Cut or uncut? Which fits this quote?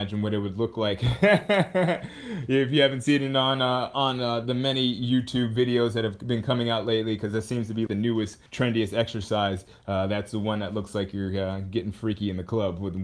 cut